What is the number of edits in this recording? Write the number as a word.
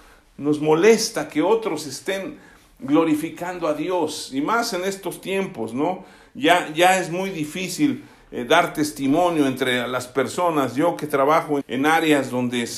one